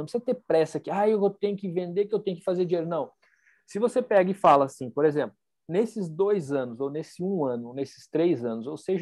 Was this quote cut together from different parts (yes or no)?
no